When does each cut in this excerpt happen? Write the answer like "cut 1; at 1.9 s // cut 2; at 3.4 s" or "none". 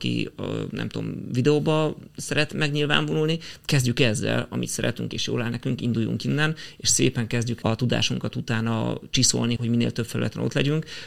cut 1; at 7.6 s // cut 2; at 9.6 s